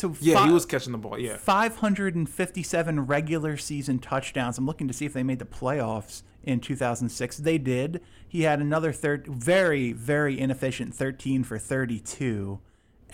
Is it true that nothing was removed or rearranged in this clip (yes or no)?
no